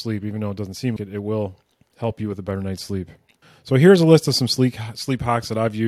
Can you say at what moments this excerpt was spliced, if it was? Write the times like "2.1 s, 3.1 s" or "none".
1.0 s, 3.4 s